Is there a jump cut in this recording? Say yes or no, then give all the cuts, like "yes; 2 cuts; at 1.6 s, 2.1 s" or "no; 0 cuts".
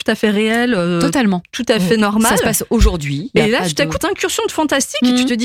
yes; 1 cut; at 4.0 s